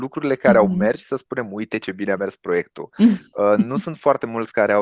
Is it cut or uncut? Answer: uncut